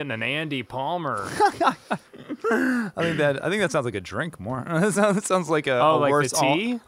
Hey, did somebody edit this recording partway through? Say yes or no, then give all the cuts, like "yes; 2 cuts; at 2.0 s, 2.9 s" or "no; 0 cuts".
no; 0 cuts